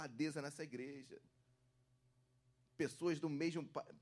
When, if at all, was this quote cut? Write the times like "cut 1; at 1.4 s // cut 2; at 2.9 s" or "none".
none